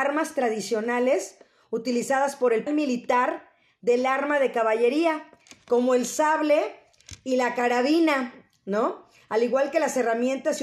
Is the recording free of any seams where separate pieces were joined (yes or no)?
no